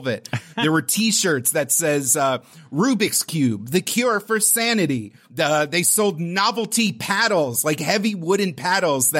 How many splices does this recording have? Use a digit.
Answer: 1